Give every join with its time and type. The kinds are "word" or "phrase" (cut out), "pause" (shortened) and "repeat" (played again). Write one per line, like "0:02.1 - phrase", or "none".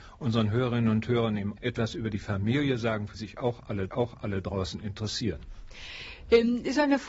0:01.6 - word
0:03.1 - word
0:03.9 - repeat